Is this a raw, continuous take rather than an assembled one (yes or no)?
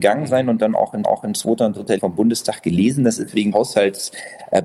no